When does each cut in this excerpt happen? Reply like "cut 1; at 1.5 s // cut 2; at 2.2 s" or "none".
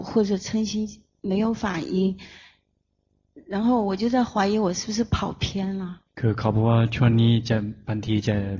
cut 1; at 6.1 s